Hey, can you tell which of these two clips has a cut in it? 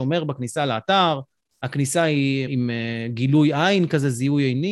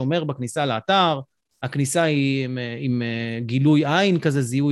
first; 1 cut; at 2.5 s

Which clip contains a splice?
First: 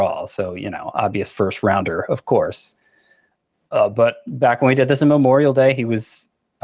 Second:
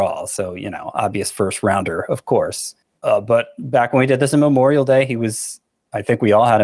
second; 1 cut; at 2.8 s

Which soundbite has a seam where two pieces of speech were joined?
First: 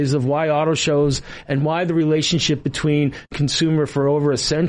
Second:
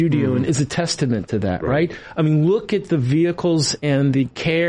first; 1 cut; at 3.3 s

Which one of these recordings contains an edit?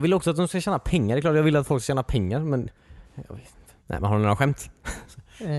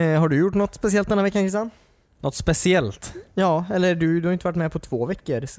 first; 2 cuts; at 3.0 s, 3.8 s

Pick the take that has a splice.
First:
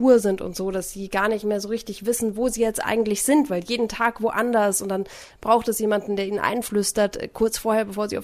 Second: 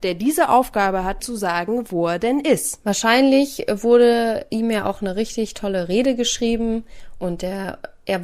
second; 1 cut; at 1.2 s

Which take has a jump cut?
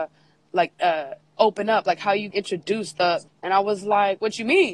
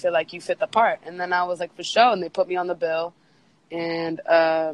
first; 2 cuts; at 2.3 s, 3.3 s

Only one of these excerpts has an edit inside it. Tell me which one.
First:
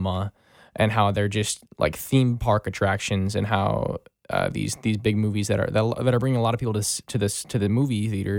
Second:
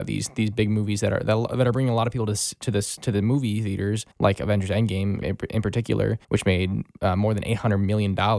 second; 3 cuts; at 4.1 s, 5.2 s, 6.2 s

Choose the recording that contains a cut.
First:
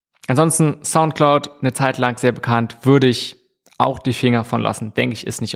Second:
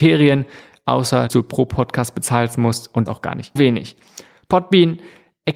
second; 3 cuts; at 1.3 s, 3.1 s, 3.6 s

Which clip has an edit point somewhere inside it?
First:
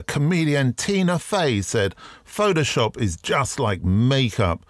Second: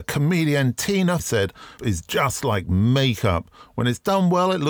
second; 2 cuts; at 1.2 s, 1.8 s

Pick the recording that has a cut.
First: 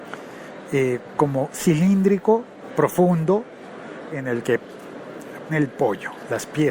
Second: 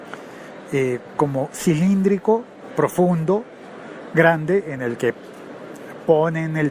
first; 2 cuts; at 4.1 s, 5.5 s

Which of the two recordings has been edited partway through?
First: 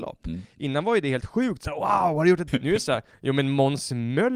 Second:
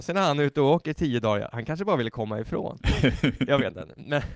first; 1 cut; at 2.5 s

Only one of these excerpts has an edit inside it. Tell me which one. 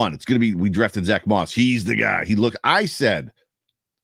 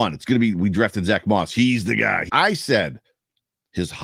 second; 1 cut; at 2.3 s

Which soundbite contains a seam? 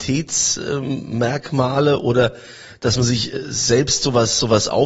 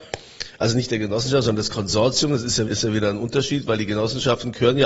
second; 1 cut; at 2.7 s

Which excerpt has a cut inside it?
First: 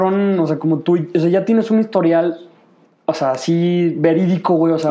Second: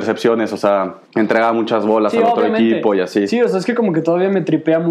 second; 1 cut; at 1.0 s

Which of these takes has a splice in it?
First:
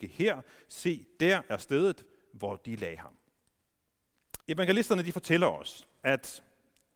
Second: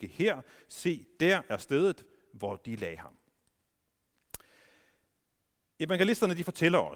first; 1 cut; at 4.4 s

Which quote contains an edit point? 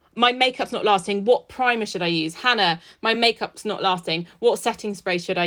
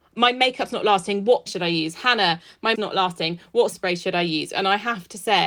second; 3 cuts; at 1.5 s, 2.7 s, 3.7 s

